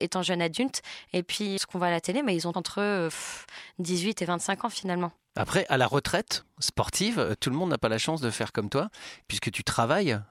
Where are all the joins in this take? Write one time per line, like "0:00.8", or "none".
0:01.6
0:02.5